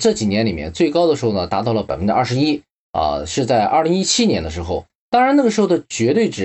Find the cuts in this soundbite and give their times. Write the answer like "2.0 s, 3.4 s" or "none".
none

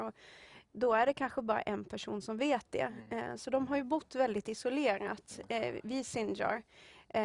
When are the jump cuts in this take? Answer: none

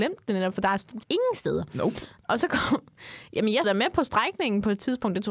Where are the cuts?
1.0 s, 3.6 s

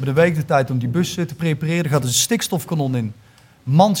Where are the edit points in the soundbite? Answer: none

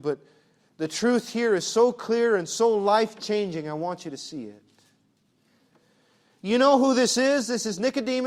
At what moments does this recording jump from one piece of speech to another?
none

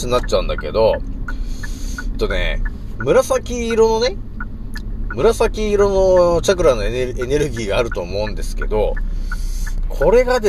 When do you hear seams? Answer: 2.1 s

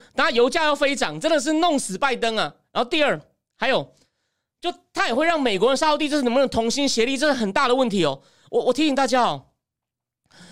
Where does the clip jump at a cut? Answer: none

